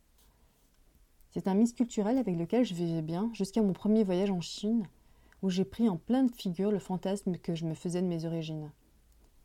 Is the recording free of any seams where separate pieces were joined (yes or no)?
yes